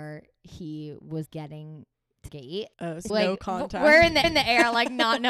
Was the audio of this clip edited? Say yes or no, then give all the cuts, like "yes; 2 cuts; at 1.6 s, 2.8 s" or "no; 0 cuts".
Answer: yes; 5 cuts; at 1.3 s, 2.3 s, 2.7 s, 3.1 s, 4.2 s